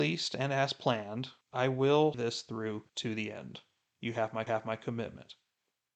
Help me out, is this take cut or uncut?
cut